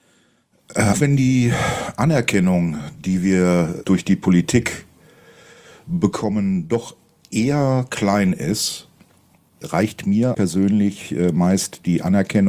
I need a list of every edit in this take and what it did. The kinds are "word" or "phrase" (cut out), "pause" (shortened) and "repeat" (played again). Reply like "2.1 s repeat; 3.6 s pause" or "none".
0.9 s word; 3.8 s word; 9.6 s word; 10.3 s word